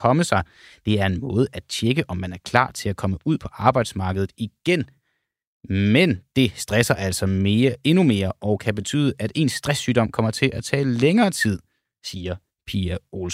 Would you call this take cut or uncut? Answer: uncut